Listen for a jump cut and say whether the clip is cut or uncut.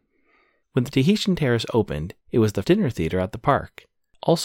cut